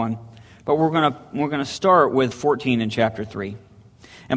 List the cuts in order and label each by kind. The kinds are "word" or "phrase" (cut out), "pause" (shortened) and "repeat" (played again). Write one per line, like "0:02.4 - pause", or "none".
0:02.3 - word